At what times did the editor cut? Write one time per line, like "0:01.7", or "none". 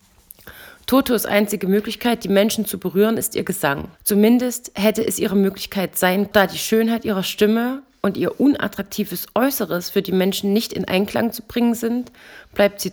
0:03.9
0:06.3